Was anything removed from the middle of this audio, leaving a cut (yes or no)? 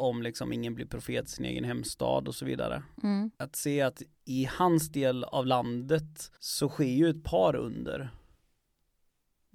yes